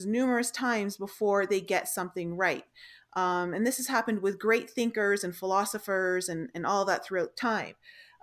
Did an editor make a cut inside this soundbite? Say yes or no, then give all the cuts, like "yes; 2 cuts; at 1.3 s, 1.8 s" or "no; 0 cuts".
no; 0 cuts